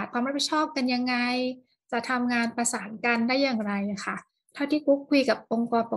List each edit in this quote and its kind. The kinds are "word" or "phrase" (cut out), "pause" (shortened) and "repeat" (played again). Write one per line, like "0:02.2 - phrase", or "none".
none